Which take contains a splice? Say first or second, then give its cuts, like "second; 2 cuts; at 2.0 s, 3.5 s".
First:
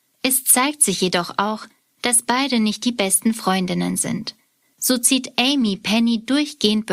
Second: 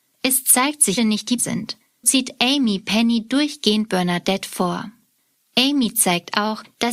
second; 3 cuts; at 1.0 s, 1.4 s, 2.0 s